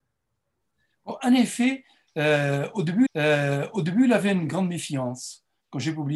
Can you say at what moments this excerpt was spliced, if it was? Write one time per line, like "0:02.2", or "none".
0:03.1